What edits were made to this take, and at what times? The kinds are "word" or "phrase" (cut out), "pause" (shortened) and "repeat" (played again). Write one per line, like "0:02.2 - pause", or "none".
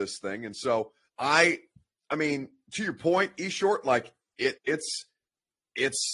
0:01.1 - pause
0:04.6 - pause

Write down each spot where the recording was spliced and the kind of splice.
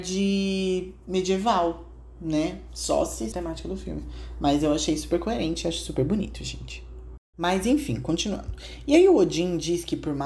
0:03.3 - phrase
0:07.2 - pause

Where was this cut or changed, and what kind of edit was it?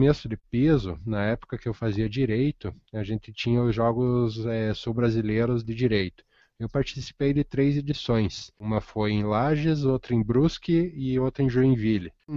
none

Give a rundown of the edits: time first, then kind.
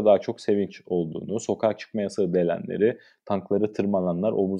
none

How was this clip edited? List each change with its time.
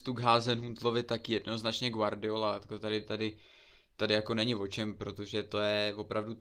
none

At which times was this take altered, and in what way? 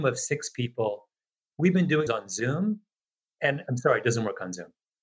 0:01.5 - word
0:02.1 - word

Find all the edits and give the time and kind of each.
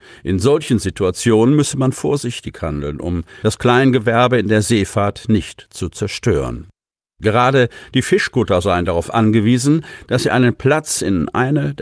none

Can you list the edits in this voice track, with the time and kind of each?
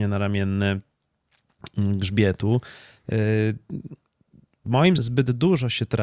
0:05.0 - word

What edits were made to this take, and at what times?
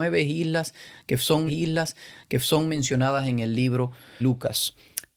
0:01.5 - repeat
0:04.2 - word

